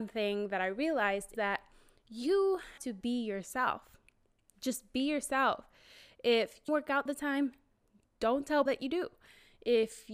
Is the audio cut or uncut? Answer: cut